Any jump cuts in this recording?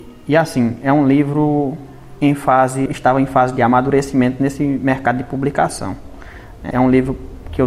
yes; 2 cuts; at 2.9 s, 6.7 s

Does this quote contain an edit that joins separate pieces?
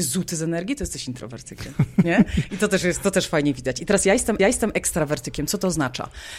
yes; 1 cut; at 4.4 s

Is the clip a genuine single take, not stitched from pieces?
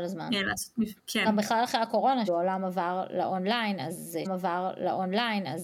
no; 3 cuts; at 1.0 s, 2.3 s, 4.2 s

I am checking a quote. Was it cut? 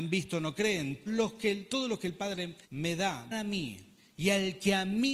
yes; 3 cuts; at 1.1 s, 2.6 s, 3.3 s

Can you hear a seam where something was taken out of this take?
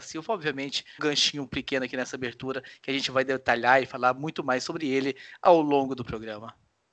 yes; 1 cut; at 1.0 s

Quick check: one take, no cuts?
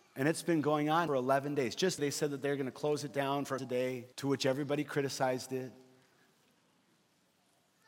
no; 4 cuts; at 1.1 s, 2.0 s, 3.6 s, 4.1 s

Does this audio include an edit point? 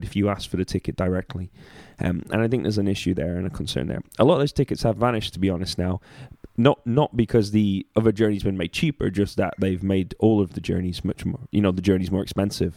no; 0 cuts

